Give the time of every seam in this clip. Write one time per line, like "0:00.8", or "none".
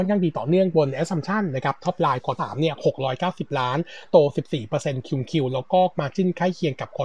0:02.4
0:05.9